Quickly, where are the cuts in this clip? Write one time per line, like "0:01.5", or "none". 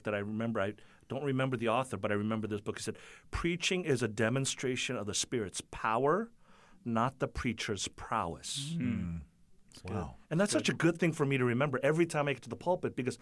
none